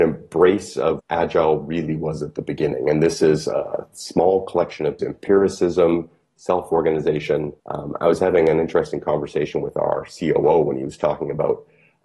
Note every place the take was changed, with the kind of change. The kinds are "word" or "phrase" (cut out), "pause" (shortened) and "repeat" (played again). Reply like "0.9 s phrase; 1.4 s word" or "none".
1.0 s word; 5.0 s word; 7.6 s pause